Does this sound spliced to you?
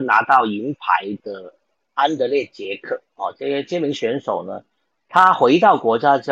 no; 0 cuts

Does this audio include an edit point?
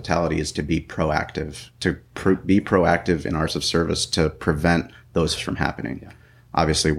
yes; 2 cuts; at 3.5 s, 5.4 s

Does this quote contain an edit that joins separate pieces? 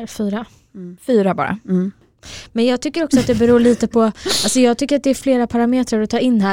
no; 0 cuts

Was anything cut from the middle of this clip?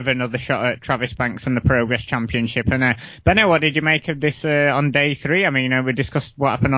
no; 0 cuts

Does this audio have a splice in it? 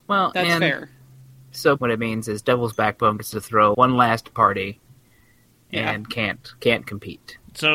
yes; 3 cuts; at 1.8 s, 3.7 s, 4.3 s

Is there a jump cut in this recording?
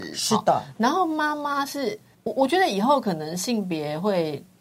yes; 1 cut; at 2.1 s

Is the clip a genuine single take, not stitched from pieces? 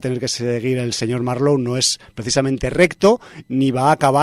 yes; 0 cuts

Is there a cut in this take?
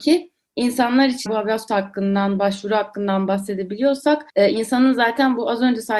yes; 3 cuts; at 1.3 s, 1.7 s, 4.3 s

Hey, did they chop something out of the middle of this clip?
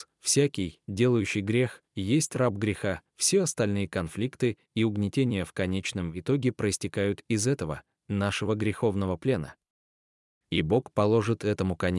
no; 0 cuts

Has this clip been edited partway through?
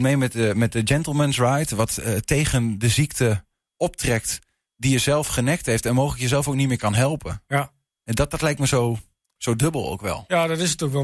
no; 0 cuts

